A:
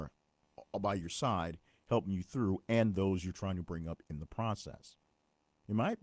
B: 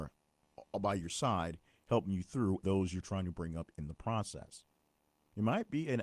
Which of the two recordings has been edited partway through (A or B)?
B